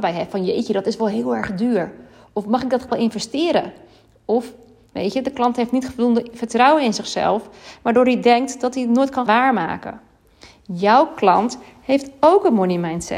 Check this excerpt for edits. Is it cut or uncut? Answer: cut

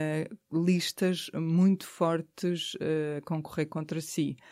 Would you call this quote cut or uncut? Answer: uncut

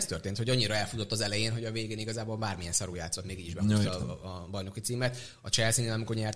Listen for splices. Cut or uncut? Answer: uncut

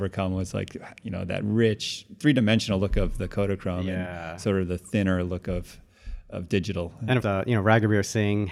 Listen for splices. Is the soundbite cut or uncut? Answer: cut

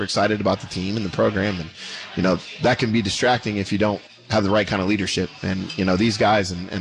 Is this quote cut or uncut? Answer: cut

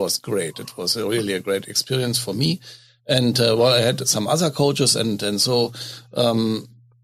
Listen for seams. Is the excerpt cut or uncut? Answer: uncut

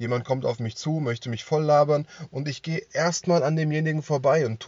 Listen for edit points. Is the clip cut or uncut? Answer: uncut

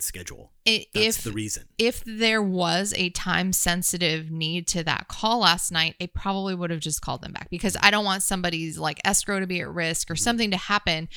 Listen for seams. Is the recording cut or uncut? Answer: uncut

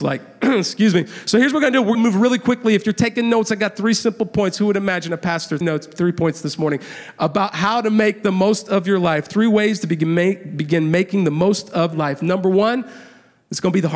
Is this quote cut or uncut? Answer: cut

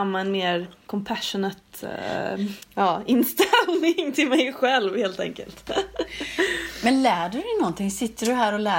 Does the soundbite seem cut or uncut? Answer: uncut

